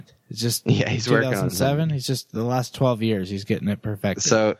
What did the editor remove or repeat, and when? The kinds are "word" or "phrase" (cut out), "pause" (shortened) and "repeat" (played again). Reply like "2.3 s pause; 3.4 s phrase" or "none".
none